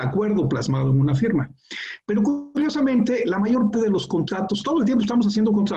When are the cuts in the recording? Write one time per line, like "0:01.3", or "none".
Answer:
0:03.7
0:04.6